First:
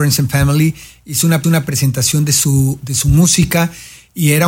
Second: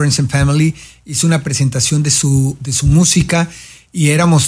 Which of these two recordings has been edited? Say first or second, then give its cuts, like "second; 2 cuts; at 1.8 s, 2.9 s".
first; 1 cut; at 1.4 s